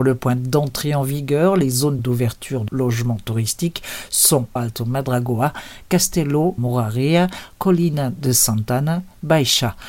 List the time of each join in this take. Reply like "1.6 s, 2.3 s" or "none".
2.0 s, 2.7 s, 4.6 s, 6.6 s